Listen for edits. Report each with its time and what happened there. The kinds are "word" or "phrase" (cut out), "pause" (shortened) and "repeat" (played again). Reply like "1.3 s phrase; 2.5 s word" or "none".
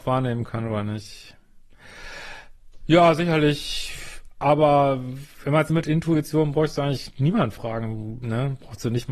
5.7 s phrase